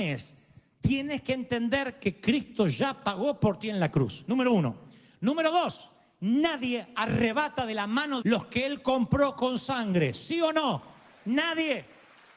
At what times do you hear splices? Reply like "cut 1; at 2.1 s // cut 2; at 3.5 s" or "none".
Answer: cut 1; at 8.2 s

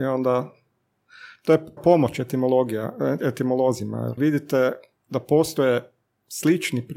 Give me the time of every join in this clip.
cut 1; at 1.8 s // cut 2; at 4.2 s

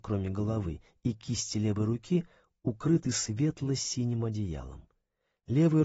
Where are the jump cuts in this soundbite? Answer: none

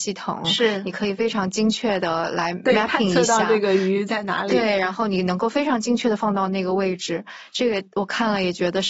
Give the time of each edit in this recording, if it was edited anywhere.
none

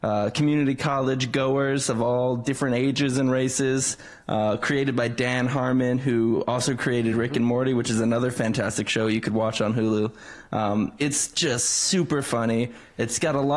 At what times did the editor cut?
none

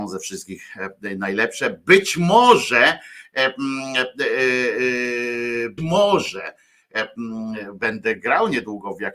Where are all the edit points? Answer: cut 1; at 5.8 s

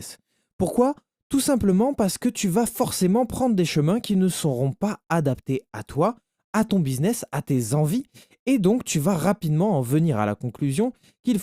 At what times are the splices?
none

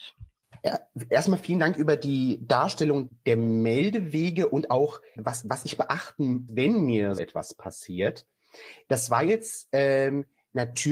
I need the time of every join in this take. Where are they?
cut 1; at 3.1 s // cut 2; at 5.2 s // cut 3; at 6.5 s // cut 4; at 7.2 s

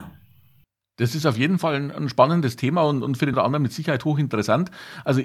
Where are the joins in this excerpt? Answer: cut 1; at 3.3 s

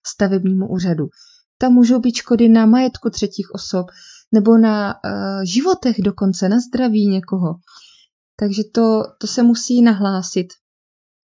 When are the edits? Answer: none

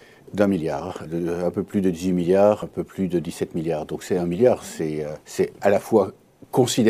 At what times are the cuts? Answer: cut 1; at 1.1 s // cut 2; at 2.6 s // cut 3; at 5.2 s

